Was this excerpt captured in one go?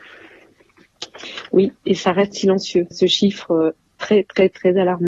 no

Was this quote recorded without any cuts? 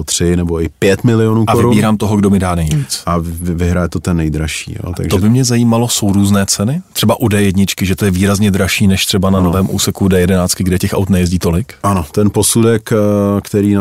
yes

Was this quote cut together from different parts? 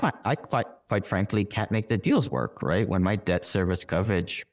no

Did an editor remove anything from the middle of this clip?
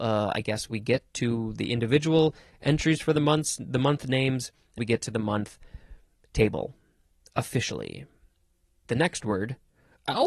yes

